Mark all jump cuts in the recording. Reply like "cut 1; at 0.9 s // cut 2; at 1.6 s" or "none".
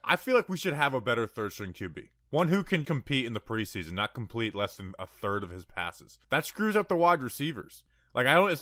cut 1; at 2.2 s // cut 2; at 2.8 s // cut 3; at 6.2 s